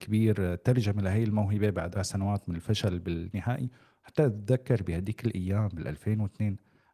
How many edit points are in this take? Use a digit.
1